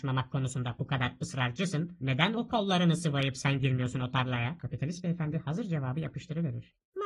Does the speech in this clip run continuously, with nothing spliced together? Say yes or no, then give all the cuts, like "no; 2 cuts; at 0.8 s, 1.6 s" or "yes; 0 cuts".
yes; 0 cuts